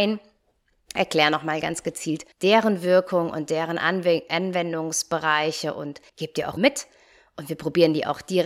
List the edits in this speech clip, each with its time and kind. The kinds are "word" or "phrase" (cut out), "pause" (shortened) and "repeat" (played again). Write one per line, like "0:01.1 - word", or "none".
0:02.3 - pause
0:06.1 - pause
0:06.6 - word

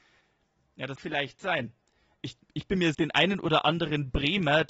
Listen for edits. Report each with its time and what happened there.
0:01.0 - word
0:02.9 - phrase

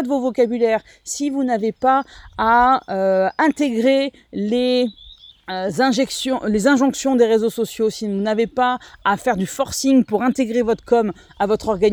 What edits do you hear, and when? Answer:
0:05.3 - pause

